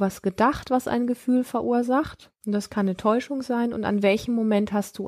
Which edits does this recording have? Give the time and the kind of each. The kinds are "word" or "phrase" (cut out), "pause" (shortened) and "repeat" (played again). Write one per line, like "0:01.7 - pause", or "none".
0:02.4 - pause